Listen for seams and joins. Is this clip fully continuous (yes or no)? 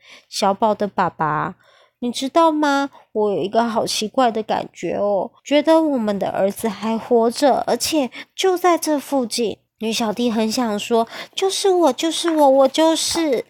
no